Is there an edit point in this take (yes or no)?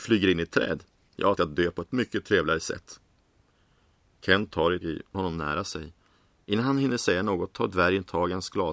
yes